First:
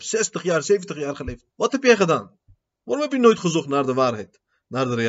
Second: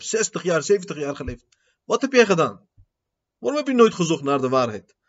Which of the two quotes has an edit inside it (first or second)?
first